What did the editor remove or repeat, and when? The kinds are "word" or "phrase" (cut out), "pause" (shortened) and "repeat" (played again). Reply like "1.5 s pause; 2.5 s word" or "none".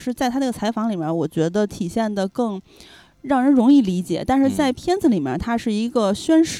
none